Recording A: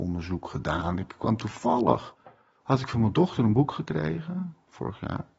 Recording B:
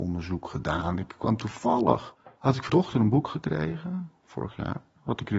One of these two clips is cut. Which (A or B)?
B